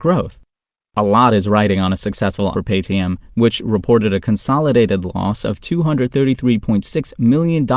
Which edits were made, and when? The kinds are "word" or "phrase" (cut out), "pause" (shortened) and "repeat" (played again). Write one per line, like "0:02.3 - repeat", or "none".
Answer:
0:02.5 - word

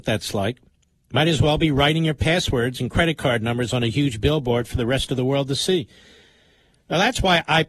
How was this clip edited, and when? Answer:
none

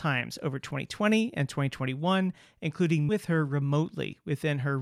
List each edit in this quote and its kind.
0:03.1 - word

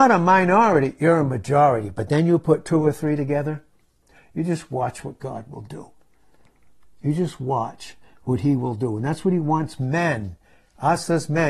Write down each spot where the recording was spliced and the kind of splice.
none

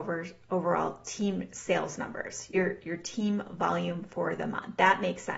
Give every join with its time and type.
none

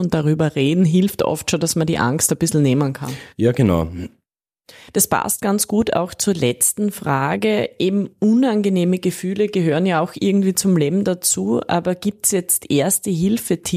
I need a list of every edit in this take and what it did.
none

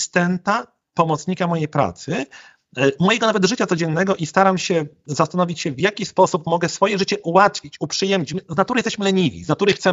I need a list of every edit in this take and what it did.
none

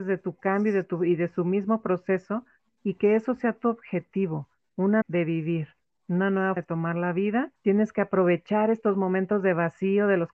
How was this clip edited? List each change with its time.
0:05.0 - phrase
0:06.6 - word

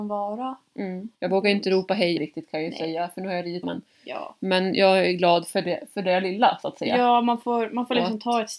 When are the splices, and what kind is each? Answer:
0:01.1 - pause
0:02.2 - word
0:03.6 - phrase

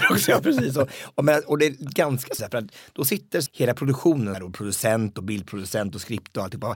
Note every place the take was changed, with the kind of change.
0:02.4 - word
0:03.5 - word
0:04.3 - word

